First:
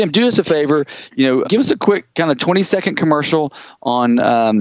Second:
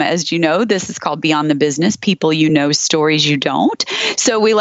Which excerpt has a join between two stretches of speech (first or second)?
first